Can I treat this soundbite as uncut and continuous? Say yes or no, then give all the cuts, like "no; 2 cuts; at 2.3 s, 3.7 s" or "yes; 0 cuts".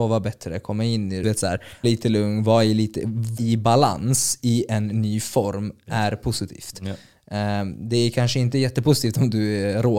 no; 3 cuts; at 1.2 s, 1.8 s, 3.4 s